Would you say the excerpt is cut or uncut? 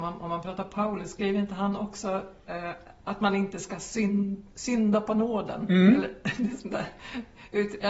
cut